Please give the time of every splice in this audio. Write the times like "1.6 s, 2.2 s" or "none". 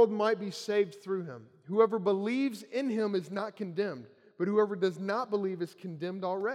none